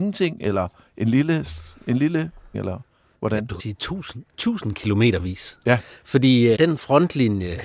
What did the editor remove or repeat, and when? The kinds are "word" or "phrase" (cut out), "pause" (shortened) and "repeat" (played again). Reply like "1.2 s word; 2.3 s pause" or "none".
2.5 s word; 3.6 s word; 6.5 s word